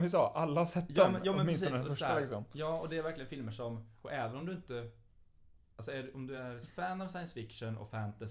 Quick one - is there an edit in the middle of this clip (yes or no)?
no